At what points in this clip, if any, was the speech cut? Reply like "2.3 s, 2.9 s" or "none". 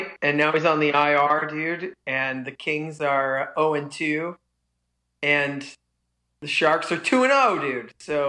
none

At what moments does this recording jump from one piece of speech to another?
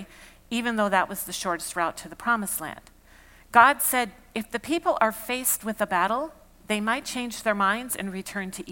none

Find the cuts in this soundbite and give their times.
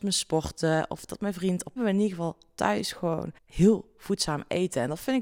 1.8 s, 3.4 s

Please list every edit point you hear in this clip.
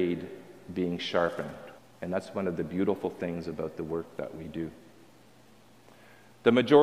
1.8 s

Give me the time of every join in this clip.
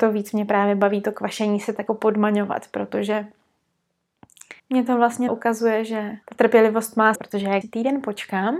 1.9 s, 4.6 s, 5.3 s, 6.2 s, 7.1 s, 7.6 s

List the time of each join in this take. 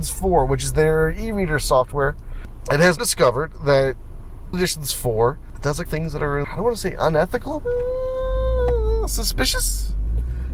3.0 s, 4.5 s, 5.9 s, 6.4 s, 7.6 s

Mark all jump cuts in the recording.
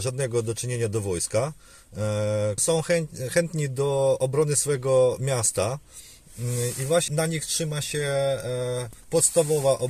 2.6 s, 7.1 s

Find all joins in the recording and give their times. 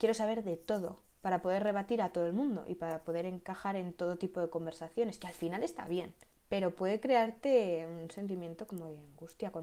1.1 s, 6.3 s

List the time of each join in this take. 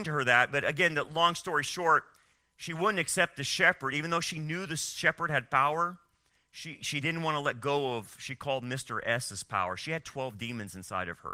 none

